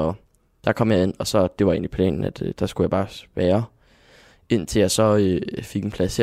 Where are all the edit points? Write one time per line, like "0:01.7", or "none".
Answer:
none